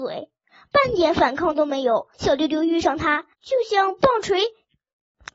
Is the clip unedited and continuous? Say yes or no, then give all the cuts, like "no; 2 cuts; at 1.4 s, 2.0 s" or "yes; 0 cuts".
no; 2 cuts; at 2.1 s, 3.3 s